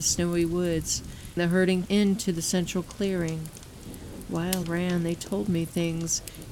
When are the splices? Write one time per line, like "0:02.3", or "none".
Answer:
0:01.4
0:01.8
0:04.6

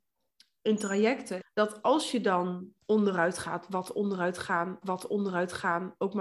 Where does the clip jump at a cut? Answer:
0:01.4
0:01.8
0:02.8
0:04.8

